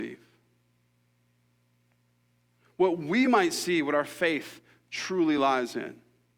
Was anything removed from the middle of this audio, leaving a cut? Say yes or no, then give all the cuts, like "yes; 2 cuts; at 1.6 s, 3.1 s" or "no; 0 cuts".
no; 0 cuts